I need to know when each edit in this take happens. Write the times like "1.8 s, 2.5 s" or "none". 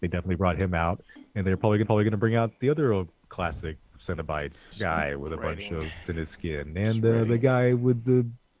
1.8 s, 4.7 s, 6.0 s